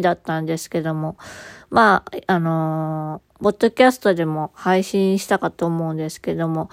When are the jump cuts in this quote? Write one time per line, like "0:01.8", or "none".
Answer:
0:03.4

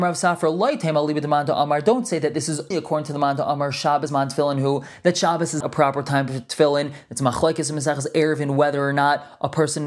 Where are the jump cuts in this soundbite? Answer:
0:02.7
0:04.1
0:05.6

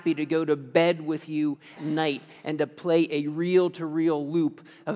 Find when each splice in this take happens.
0:01.8

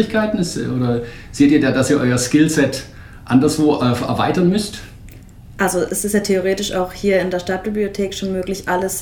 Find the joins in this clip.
none

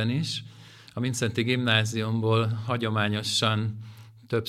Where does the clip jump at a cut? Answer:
none

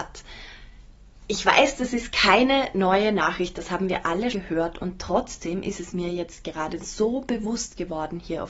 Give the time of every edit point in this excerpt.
0:04.3

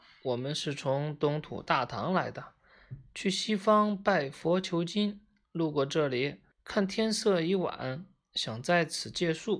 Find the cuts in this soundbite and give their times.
0:06.5

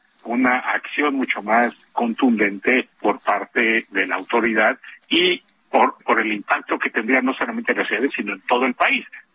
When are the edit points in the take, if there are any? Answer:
0:02.9
0:06.0
0:08.1

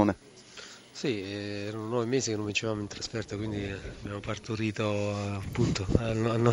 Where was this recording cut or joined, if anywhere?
none

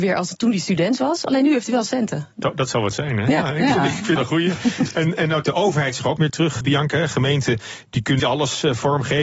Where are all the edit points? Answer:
0:02.4
0:04.2
0:05.4
0:06.2
0:06.6
0:08.2

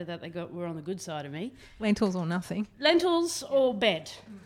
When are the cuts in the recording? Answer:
none

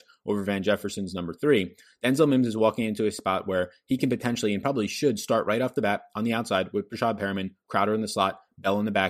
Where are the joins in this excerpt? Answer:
none

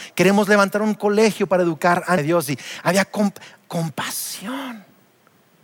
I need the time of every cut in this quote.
0:02.2

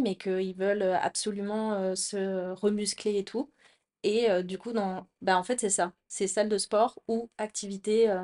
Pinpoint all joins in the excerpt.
none

